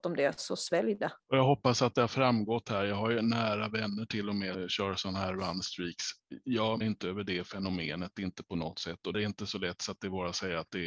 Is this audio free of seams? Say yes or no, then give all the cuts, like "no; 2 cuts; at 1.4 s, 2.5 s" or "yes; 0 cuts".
no; 4 cuts; at 1.2 s, 4.5 s, 6.8 s, 9.1 s